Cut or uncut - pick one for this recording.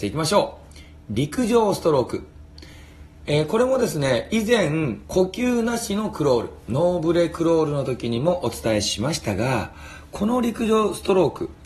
uncut